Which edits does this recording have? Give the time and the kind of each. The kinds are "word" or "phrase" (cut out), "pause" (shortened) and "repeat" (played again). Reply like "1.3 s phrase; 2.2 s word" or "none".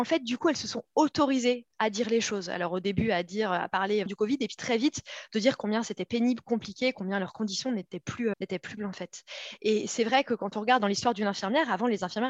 4.1 s word; 4.6 s word; 8.3 s word; 8.8 s word

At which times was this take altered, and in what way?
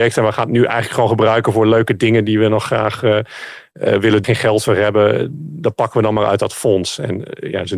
4.2 s phrase

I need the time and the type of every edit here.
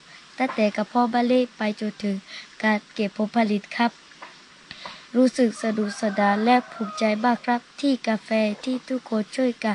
5.0 s pause; 7.7 s pause

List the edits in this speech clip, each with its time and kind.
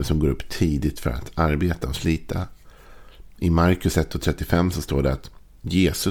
none

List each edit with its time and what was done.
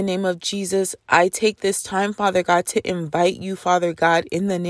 none

